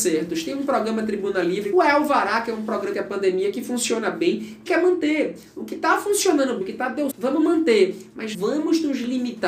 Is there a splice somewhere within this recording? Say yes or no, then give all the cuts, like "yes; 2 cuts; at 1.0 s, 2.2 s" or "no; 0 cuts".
yes; 6 cuts; at 1.7 s, 2.9 s, 4.7 s, 6.6 s, 7.1 s, 8.3 s